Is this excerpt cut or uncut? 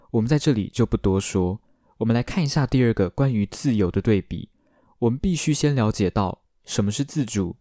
uncut